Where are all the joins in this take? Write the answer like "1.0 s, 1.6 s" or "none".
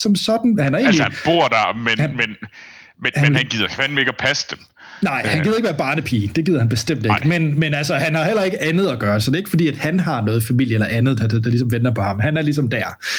none

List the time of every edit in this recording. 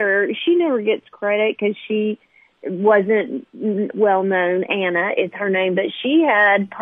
none

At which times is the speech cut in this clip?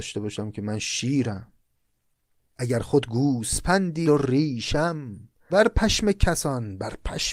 4.0 s, 5.5 s

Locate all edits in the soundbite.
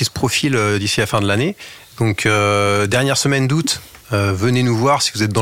none

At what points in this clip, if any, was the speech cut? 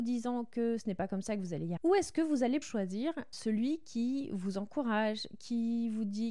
1.8 s, 2.6 s, 3.3 s

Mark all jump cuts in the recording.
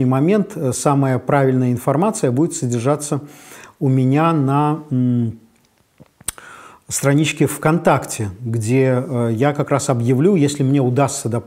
none

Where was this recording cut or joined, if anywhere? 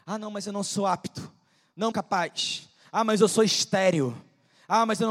1.9 s

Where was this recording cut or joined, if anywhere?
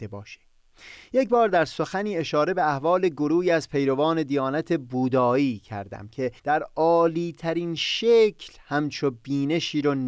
6.4 s

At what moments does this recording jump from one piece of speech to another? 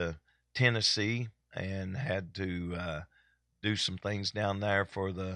none

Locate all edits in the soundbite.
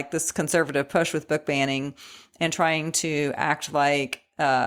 none

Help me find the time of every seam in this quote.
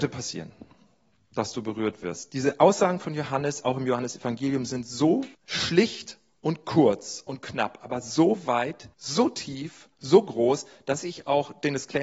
5.3 s, 8.9 s, 9.9 s

